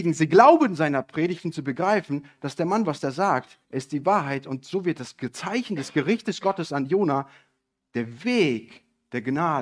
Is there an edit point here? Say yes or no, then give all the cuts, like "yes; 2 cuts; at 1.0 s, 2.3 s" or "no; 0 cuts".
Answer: yes; 1 cut; at 3.6 s